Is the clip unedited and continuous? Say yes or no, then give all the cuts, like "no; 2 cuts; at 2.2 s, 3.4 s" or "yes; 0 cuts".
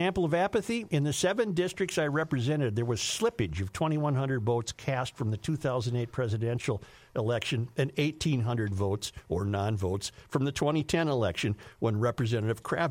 yes; 0 cuts